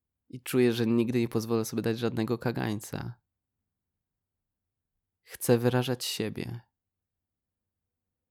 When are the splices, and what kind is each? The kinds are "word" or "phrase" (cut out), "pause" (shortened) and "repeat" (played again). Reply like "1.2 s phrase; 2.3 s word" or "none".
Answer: none